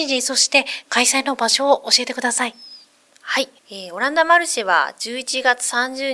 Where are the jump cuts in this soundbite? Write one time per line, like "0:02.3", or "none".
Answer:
0:03.6